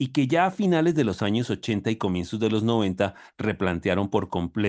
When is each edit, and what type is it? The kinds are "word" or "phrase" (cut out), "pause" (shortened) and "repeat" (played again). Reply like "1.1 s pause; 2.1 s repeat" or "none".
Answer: none